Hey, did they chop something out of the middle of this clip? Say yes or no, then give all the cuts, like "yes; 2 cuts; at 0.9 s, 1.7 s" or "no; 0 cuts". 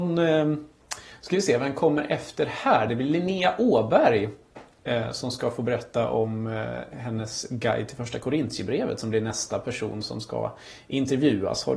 no; 0 cuts